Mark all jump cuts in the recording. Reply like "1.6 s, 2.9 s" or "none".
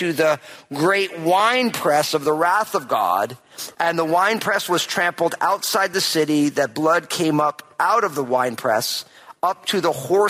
none

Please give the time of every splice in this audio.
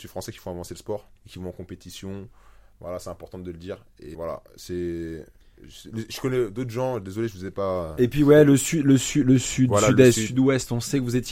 1.2 s, 4.1 s

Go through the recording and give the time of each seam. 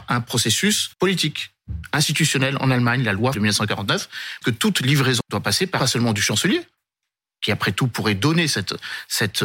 0.9 s, 3.3 s, 4.4 s, 5.2 s, 5.8 s

